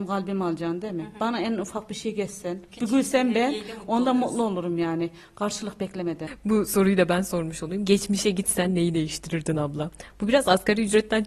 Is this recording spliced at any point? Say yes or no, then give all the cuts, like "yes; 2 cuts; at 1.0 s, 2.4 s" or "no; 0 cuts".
no; 0 cuts